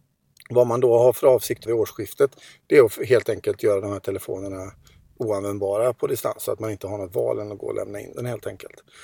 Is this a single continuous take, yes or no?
no